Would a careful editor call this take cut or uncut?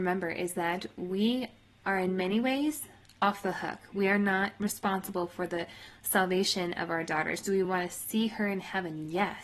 uncut